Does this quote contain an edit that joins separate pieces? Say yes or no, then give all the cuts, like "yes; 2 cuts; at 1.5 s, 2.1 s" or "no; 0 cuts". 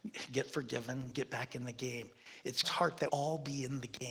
yes; 3 cuts; at 1.1 s, 2.6 s, 3.1 s